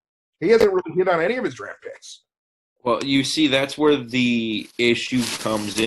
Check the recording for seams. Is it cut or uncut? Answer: uncut